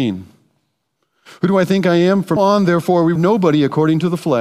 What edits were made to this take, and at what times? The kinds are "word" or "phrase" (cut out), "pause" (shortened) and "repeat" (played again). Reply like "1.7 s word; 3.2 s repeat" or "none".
2.4 s word; 3.2 s word

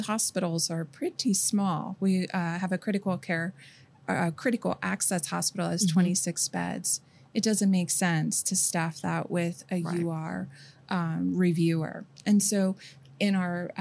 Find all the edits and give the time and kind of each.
none

